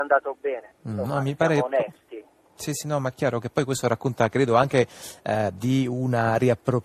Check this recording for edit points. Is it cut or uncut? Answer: uncut